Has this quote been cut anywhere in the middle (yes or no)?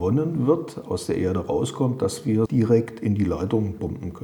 yes